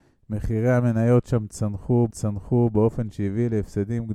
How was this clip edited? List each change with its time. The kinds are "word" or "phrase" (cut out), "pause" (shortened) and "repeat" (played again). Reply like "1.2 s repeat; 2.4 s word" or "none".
2.1 s repeat

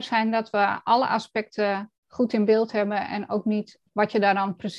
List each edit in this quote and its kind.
2.0 s pause; 3.9 s pause

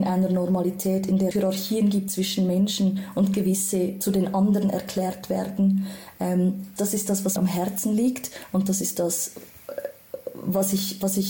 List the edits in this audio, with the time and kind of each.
1.3 s word; 6.8 s word; 7.4 s word

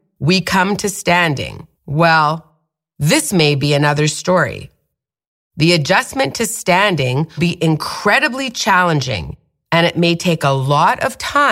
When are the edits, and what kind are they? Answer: 1.8 s pause; 7.4 s word

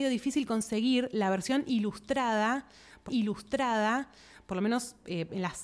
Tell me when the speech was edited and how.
3.1 s repeat

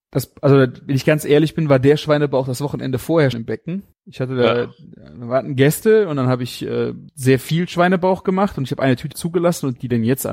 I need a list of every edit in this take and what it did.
3.3 s word; 3.9 s pause; 7.1 s pause; 9.1 s word

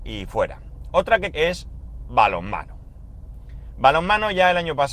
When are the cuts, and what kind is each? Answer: 1.3 s word

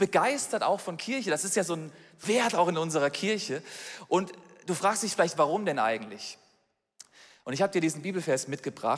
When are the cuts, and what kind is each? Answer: 2.2 s word

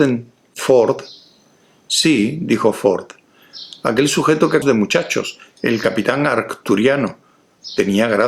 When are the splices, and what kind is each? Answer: 4.6 s word

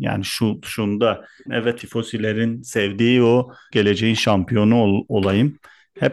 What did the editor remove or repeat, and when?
1.5 s word; 1.8 s word; 3.7 s phrase

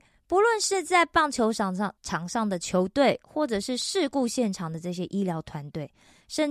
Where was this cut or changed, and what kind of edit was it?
2.0 s pause

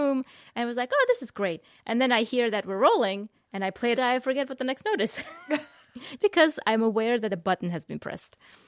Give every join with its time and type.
4.0 s phrase; 6.2 s word

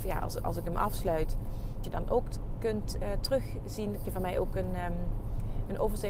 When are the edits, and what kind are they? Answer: 1.8 s word; 4.0 s word

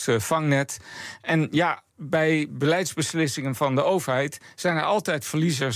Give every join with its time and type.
1.9 s pause

